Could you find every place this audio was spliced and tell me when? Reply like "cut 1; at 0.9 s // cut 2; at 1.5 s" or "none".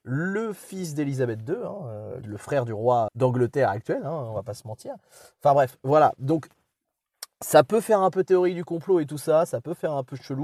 cut 1; at 2.2 s // cut 2; at 3.1 s